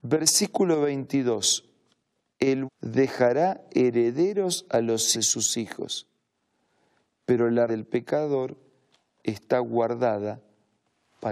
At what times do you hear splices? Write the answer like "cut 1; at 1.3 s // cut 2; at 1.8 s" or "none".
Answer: cut 1; at 2.7 s // cut 2; at 5.1 s // cut 3; at 7.7 s

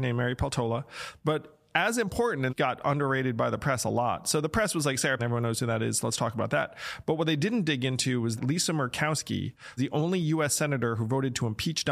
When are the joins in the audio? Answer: cut 1; at 2.5 s // cut 2; at 5.2 s // cut 3; at 8.4 s // cut 4; at 9.8 s

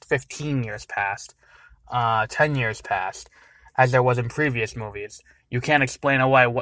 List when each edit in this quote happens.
none

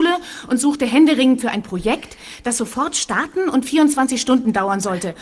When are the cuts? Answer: cut 1; at 1.4 s

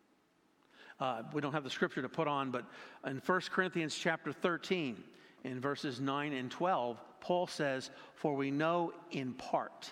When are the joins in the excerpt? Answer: none

